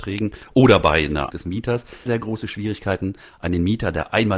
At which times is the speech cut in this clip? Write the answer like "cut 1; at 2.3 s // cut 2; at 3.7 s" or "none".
cut 1; at 1.3 s // cut 2; at 2.1 s